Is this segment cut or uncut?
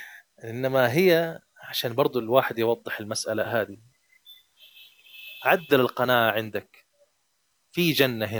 uncut